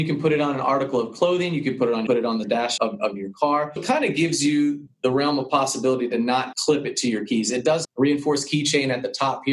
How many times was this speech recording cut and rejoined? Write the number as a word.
seven